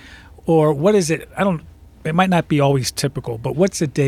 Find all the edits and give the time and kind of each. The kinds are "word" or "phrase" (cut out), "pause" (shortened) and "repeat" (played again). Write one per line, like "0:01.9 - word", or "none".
none